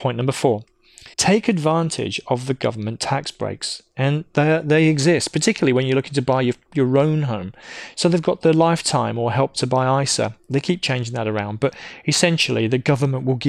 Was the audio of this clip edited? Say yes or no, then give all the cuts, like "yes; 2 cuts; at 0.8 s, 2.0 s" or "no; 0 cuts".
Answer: yes; 1 cut; at 1.1 s